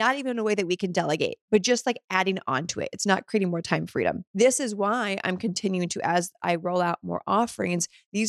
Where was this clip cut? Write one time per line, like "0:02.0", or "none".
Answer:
0:04.3